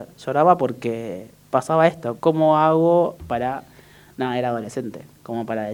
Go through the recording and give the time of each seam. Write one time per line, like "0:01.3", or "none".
0:02.2
0:03.2